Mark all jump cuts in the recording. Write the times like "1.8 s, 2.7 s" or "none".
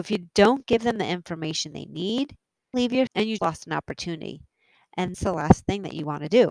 2.7 s, 3.1 s, 3.4 s, 5.1 s